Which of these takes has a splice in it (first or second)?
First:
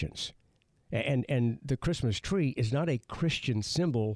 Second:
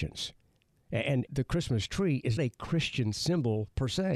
second